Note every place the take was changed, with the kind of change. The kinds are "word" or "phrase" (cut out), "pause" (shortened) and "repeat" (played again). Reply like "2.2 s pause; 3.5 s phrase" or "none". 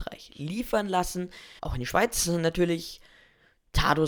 1.6 s pause

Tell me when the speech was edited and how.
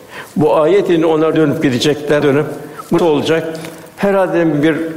1.3 s word; 2.2 s word; 3.0 s word

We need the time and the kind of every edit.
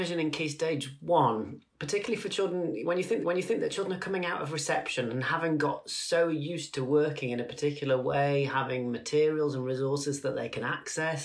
1.7 s pause; 3.2 s repeat

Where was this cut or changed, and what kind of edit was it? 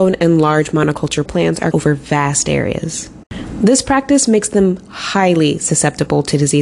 1.3 s phrase; 1.7 s word

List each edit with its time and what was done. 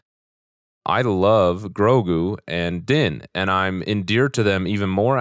none

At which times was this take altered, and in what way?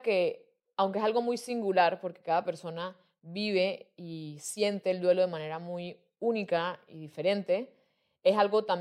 none

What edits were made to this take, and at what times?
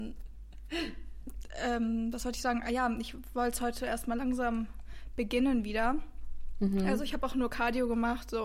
none

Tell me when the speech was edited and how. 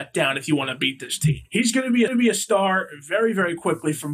2.1 s repeat

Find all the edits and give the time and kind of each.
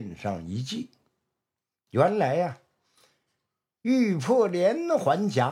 none

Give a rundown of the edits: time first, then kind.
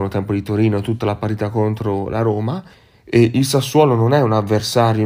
2.7 s pause

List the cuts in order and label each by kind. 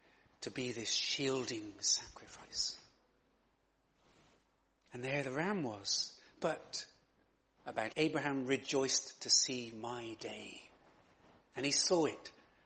7.6 s phrase; 7.9 s word

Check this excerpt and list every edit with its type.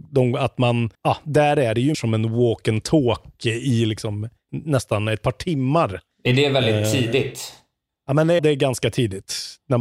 0.9 s pause; 1.9 s word; 4.5 s word; 7.9 s pause; 8.4 s word

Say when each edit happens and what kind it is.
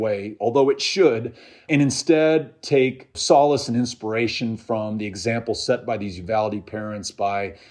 none

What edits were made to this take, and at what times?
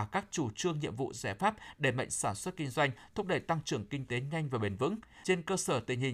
none

